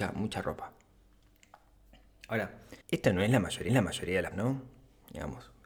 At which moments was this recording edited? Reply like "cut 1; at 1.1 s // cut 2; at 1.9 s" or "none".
cut 1; at 2.8 s // cut 2; at 3.7 s // cut 3; at 4.3 s